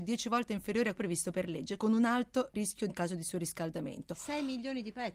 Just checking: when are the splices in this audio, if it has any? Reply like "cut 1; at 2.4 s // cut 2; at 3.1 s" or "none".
cut 1; at 0.9 s // cut 2; at 1.8 s // cut 3; at 2.9 s

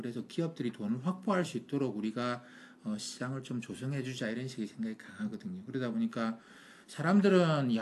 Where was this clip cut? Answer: none

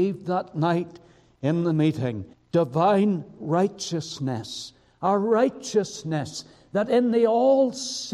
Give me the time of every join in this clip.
cut 1; at 2.3 s

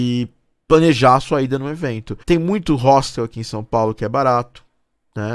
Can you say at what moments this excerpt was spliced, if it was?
cut 1; at 2.2 s

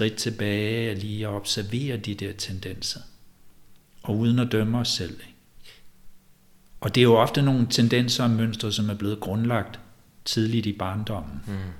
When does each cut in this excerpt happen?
none

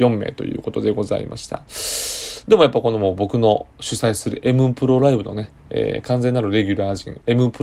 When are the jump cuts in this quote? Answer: cut 1; at 5.6 s

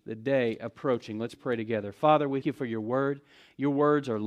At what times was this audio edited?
cut 1; at 2.4 s

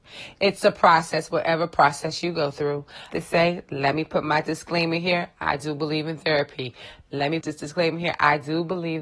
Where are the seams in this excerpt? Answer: cut 1; at 3.1 s // cut 2; at 7.4 s

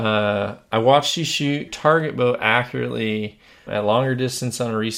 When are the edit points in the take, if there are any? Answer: cut 1; at 1.7 s // cut 2; at 3.7 s

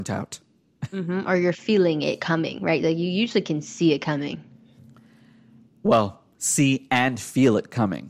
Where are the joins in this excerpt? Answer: none

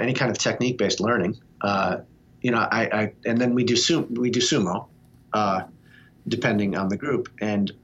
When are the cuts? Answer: cut 1; at 1.5 s

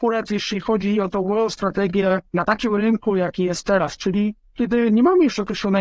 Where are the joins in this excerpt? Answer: cut 1; at 2.3 s

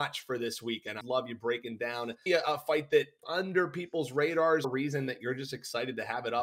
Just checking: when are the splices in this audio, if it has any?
cut 1; at 1.0 s // cut 2; at 2.3 s // cut 3; at 3.2 s // cut 4; at 4.6 s

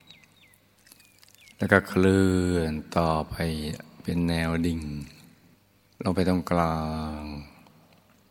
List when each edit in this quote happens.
cut 1; at 5.5 s

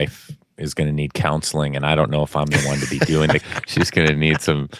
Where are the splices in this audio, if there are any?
cut 1; at 3.4 s

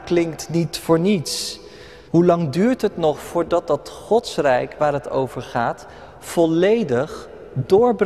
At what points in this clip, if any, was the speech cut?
cut 1; at 2.1 s

